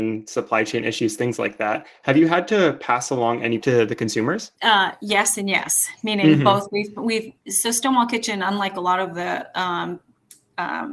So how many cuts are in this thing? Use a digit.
2